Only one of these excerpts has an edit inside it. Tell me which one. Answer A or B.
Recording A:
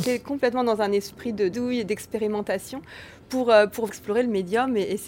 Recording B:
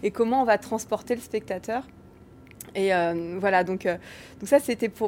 A